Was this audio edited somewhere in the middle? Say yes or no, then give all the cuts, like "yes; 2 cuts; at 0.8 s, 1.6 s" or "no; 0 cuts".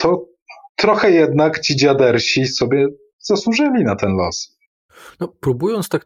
no; 0 cuts